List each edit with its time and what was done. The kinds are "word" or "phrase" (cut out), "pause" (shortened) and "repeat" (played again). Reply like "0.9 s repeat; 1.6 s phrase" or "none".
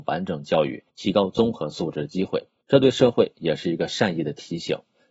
2.6 s pause